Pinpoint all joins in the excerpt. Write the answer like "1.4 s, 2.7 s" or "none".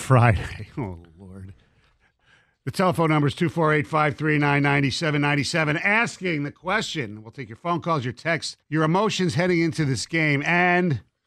8.6 s